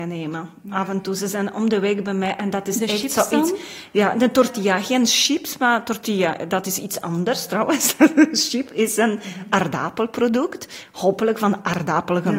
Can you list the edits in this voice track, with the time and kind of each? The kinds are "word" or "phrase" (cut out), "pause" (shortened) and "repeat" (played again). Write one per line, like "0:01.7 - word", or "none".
none